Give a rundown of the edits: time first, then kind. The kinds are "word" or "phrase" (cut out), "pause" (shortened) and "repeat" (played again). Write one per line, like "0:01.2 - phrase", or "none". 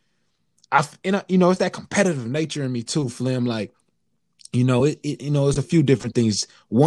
none